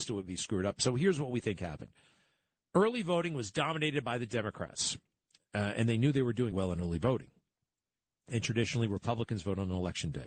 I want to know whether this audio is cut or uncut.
cut